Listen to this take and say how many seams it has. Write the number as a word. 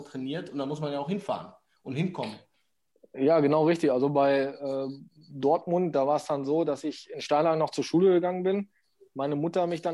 zero